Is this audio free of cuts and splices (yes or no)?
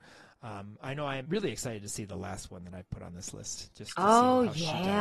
no